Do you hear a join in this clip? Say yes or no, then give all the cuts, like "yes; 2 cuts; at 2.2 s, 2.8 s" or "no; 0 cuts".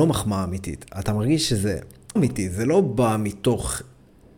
yes; 1 cut; at 2.2 s